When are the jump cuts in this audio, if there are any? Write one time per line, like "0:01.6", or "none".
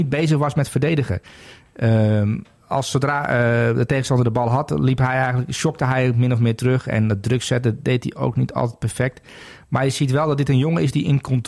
none

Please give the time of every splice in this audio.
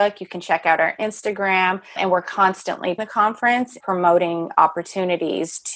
0:02.0
0:03.0
0:03.8

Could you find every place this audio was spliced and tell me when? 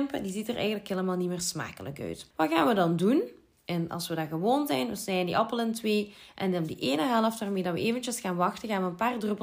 0:02.3

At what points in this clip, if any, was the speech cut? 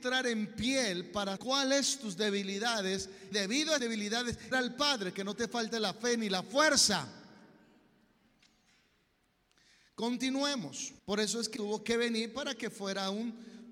0:01.4
0:03.3
0:03.8
0:04.5
0:11.0
0:11.6

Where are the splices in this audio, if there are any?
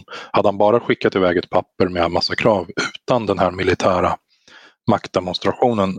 none

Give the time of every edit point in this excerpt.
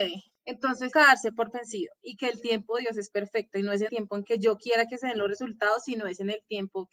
0:00.9
0:03.9

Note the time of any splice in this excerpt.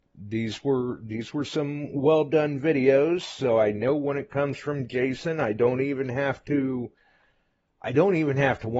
none

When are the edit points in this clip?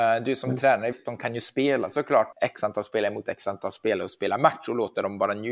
0:00.9
0:02.3

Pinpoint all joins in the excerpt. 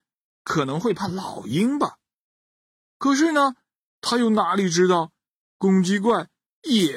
none

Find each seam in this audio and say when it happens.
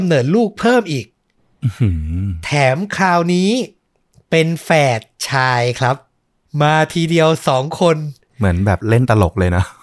none

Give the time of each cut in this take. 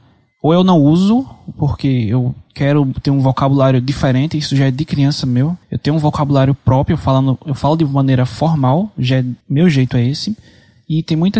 0:02.5
0:05.6
0:09.4

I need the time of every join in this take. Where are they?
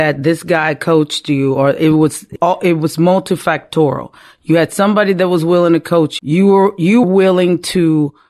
0:02.4
0:06.2
0:07.0

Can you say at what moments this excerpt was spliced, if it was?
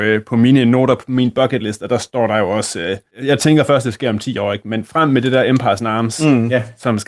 none

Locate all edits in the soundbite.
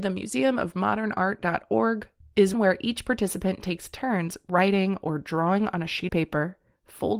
0:02.5
0:06.1

